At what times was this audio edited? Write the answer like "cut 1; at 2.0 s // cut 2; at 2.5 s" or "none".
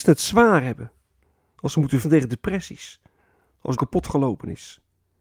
cut 1; at 1.2 s // cut 2; at 2.0 s // cut 3; at 3.2 s // cut 4; at 3.8 s